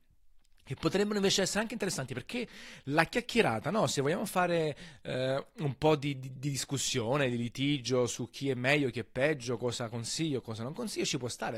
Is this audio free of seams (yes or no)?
yes